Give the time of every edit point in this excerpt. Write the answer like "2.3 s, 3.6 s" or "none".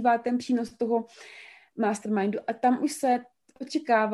none